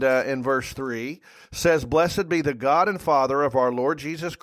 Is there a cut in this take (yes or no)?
no